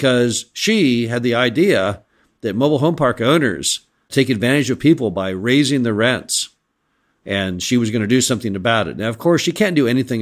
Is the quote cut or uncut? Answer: uncut